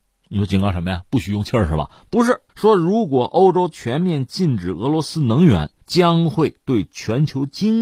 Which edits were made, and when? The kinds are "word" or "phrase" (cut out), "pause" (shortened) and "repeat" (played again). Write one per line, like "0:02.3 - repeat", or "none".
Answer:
0:02.5 - pause
0:05.8 - pause